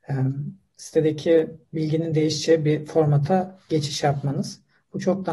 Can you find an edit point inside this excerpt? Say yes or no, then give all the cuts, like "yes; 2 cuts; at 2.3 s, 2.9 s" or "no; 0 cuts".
yes; 1 cut; at 1.7 s